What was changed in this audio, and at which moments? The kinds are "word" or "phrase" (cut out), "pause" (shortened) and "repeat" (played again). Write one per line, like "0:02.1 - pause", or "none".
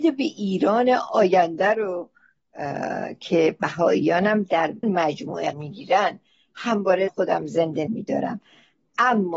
0:04.8 - word
0:05.5 - word
0:07.1 - word
0:07.9 - word